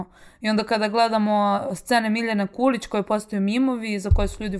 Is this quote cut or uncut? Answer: uncut